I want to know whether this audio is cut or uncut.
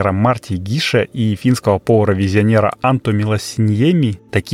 uncut